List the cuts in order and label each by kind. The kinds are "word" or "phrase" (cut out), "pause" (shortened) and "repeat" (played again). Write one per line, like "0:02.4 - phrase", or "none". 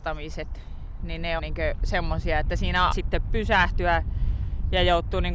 0:01.4 - word
0:02.9 - word

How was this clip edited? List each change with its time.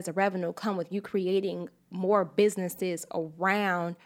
none

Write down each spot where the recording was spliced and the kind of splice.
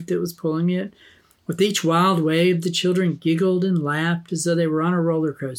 none

